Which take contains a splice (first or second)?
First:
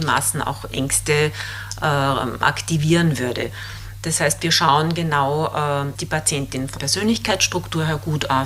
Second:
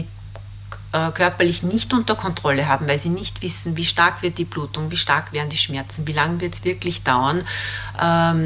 first